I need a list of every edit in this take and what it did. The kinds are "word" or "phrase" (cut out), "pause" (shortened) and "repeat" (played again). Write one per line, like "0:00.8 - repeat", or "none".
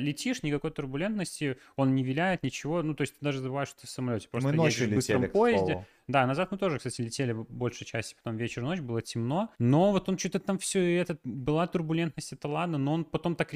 0:09.5 - pause